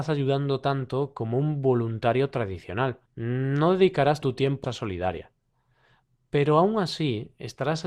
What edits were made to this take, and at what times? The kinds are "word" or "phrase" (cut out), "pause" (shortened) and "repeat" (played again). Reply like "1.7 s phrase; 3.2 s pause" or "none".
3.1 s pause; 4.2 s word; 4.6 s phrase

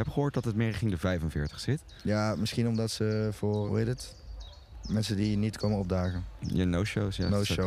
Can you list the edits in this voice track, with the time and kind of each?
3.7 s word

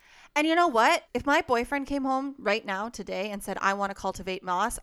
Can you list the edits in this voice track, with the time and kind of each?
1.0 s pause

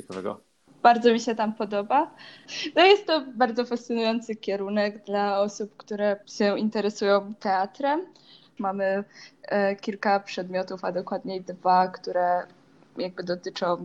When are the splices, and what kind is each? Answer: 6.2 s pause; 7.4 s phrase

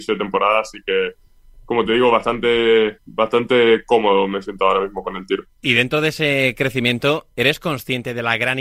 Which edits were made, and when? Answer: none

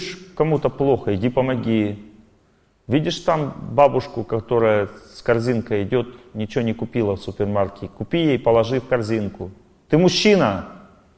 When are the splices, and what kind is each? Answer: none

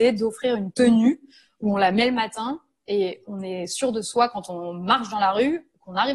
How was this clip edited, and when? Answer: none

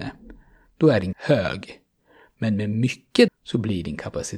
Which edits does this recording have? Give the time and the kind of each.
1.1 s word; 3.3 s word

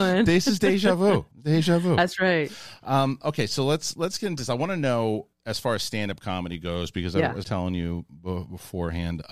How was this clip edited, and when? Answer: 1.3 s pause; 5.3 s pause; 7.4 s phrase

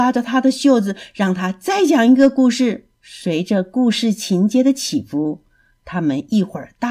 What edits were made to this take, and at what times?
2.9 s pause

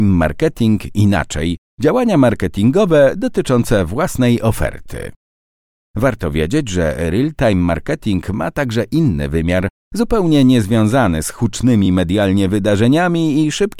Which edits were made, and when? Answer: none

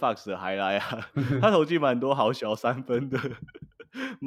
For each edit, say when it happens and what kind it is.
none

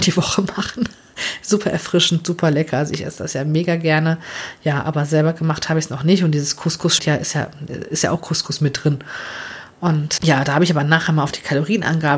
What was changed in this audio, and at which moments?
7.0 s word; 10.2 s word

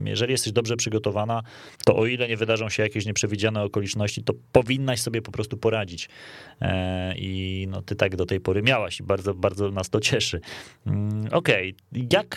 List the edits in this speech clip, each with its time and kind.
1.7 s pause

